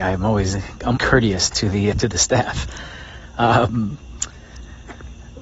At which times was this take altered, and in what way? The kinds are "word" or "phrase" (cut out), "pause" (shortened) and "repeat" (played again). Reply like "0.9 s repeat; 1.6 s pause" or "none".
1.0 s word; 1.9 s word

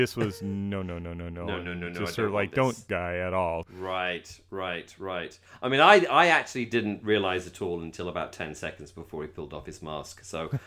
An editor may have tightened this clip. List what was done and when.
2.9 s phrase

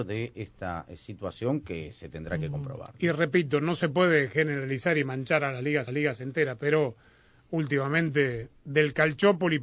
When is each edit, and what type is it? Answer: 5.9 s repeat

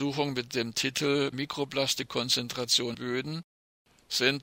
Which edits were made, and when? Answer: 1.3 s word; 2.9 s word

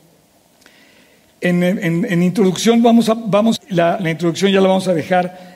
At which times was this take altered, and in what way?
3.6 s phrase; 4.0 s word

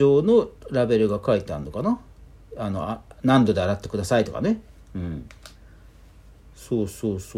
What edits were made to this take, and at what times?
none

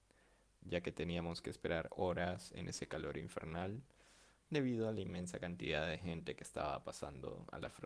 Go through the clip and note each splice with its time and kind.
none

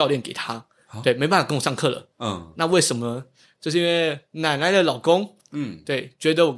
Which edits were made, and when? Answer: none

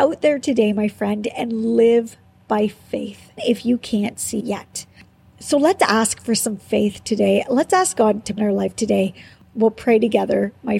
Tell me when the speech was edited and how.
3.4 s word; 4.4 s word; 8.4 s phrase

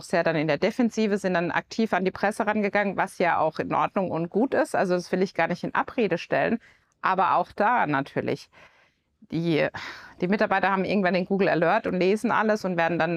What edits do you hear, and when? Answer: none

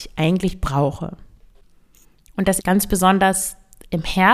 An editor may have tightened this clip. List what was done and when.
2.6 s word

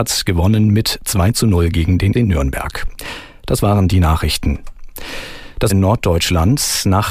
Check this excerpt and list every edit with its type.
2.1 s phrase; 5.7 s word

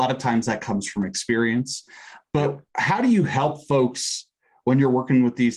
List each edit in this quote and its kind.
2.7 s pause

